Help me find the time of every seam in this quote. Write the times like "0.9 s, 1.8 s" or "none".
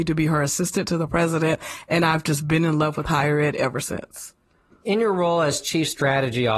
none